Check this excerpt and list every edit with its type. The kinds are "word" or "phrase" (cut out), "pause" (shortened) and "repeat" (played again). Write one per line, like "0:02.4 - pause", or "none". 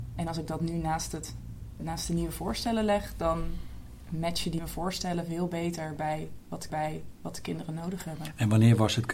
0:01.8 - word
0:04.6 - word
0:06.7 - repeat